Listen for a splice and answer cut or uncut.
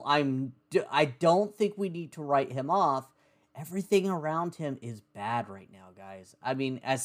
uncut